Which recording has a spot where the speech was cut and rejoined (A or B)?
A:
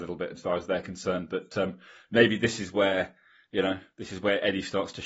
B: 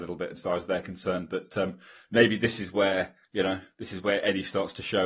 B